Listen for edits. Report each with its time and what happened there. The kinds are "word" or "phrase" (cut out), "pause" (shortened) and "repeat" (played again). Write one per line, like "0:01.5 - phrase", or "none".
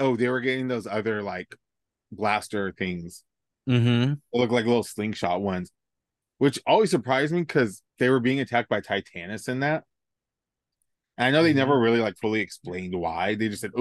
0:07.9 - pause